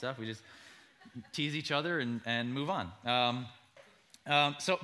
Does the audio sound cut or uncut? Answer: uncut